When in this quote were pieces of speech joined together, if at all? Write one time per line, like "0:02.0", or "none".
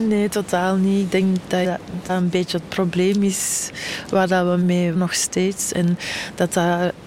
0:01.6
0:02.1
0:04.9